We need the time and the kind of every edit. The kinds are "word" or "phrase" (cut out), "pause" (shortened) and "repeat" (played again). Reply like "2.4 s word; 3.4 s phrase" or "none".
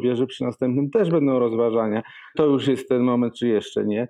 2.3 s word